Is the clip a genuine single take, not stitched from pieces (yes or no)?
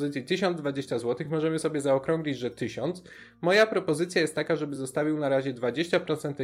yes